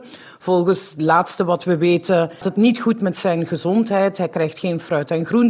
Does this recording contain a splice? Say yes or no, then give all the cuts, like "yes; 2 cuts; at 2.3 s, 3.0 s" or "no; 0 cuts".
yes; 1 cut; at 2.4 s